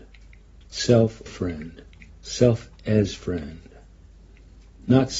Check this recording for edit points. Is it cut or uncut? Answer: cut